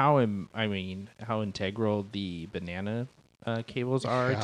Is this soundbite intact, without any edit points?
yes; 0 cuts

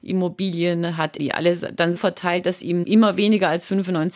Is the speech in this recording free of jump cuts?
no; 3 cuts; at 1.2 s, 2.0 s, 2.8 s

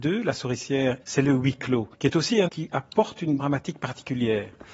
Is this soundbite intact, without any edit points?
no; 4 cuts; at 1.0 s, 1.9 s, 2.5 s, 3.4 s

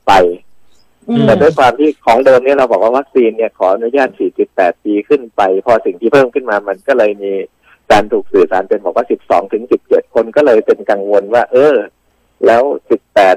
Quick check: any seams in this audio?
no; 0 cuts

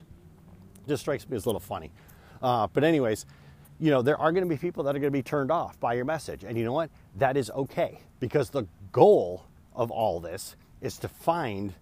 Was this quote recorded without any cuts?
yes; 0 cuts

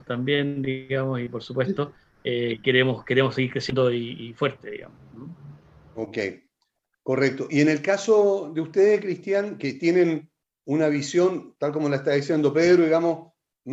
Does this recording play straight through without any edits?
yes; 0 cuts

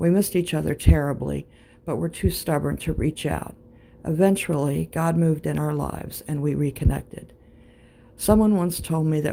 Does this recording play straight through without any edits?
yes; 0 cuts

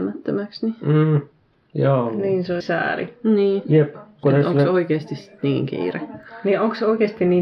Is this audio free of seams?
no; 3 cuts; at 1.5 s, 2.6 s, 4.2 s

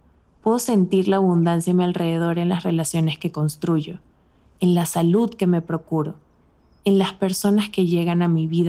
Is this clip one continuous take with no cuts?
yes; 0 cuts

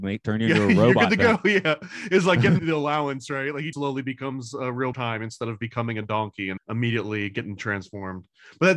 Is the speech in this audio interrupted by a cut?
yes; 4 cuts; at 2.6 s, 3.7 s, 4.9 s, 6.6 s

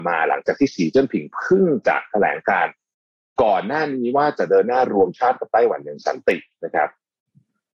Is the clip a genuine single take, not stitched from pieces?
yes; 0 cuts

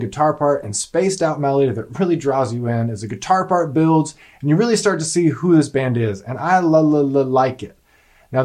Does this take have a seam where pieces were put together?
no; 0 cuts

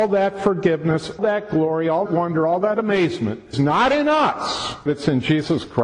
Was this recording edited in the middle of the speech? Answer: yes; 4 cuts; at 1.2 s, 2.1 s, 3.5 s, 4.9 s

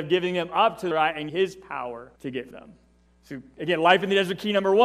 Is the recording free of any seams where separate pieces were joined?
no; 5 cuts; at 0.9 s, 1.3 s, 2.2 s, 2.5 s, 3.1 s

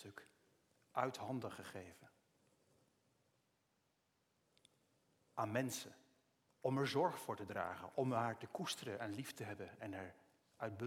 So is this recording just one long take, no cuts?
yes; 0 cuts

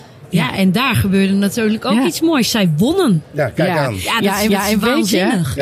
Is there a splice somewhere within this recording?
yes; 1 cut; at 4.5 s

